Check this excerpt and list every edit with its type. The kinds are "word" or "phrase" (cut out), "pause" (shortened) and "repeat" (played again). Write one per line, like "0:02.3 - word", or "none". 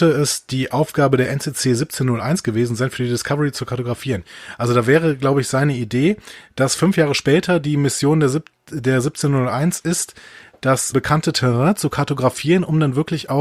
0:10.9 - word